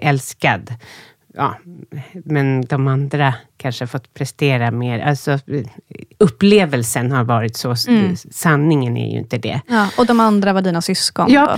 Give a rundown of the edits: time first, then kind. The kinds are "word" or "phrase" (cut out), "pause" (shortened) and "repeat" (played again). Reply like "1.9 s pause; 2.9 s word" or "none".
3.5 s pause; 6.1 s pause